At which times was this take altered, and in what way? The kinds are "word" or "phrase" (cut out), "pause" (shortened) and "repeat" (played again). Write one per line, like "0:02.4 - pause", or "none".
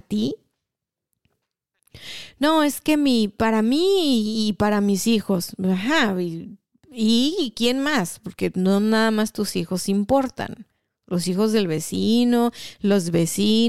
none